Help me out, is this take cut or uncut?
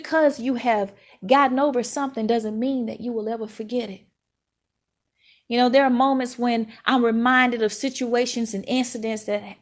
uncut